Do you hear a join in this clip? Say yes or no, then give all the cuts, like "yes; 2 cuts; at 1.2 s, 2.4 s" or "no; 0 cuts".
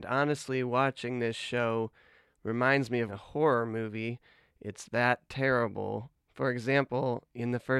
yes; 1 cut; at 3.1 s